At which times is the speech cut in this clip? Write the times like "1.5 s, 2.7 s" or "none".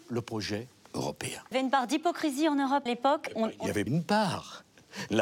1.5 s, 2.9 s, 3.3 s, 3.9 s